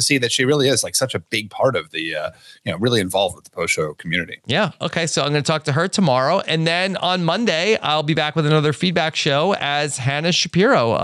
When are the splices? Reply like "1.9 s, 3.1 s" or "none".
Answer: none